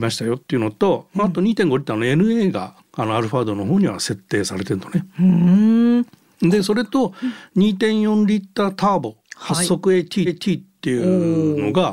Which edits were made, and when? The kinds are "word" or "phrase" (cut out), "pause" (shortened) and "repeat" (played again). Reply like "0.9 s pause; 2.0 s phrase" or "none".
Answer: 9.2 s pause; 10.3 s repeat